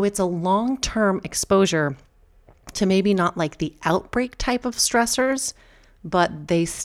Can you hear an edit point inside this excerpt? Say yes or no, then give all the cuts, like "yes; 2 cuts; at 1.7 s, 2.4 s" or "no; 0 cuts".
no; 0 cuts